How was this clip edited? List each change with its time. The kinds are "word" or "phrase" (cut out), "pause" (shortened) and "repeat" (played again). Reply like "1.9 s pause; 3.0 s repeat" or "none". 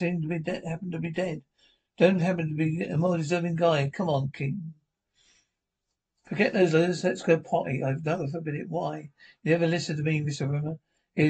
none